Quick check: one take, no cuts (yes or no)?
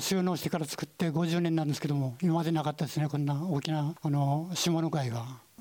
yes